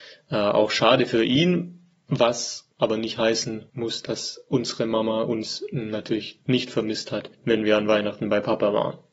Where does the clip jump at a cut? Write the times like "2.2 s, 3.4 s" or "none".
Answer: 6.4 s, 7.3 s